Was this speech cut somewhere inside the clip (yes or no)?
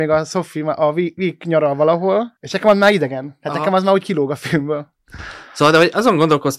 yes